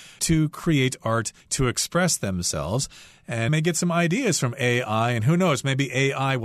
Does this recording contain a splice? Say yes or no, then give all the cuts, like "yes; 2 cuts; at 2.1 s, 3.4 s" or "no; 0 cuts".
yes; 2 cuts; at 1.4 s, 3.5 s